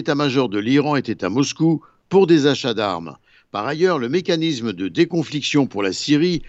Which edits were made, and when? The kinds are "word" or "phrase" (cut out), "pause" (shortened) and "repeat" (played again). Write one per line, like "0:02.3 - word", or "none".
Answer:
none